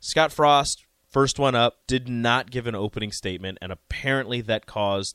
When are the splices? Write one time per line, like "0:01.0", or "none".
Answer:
0:01.8